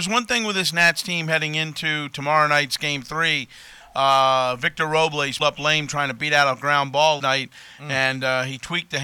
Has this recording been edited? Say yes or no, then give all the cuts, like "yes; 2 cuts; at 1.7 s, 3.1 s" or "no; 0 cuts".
yes; 2 cuts; at 5.4 s, 7.2 s